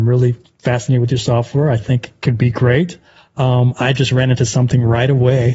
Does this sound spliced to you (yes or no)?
no